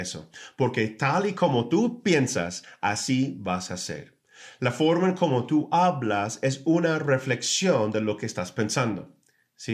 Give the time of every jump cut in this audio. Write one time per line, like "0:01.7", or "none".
none